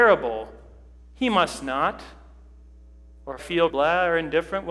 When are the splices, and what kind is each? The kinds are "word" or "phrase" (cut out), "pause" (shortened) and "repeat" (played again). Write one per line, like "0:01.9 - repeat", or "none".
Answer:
0:03.4 - word
0:03.7 - phrase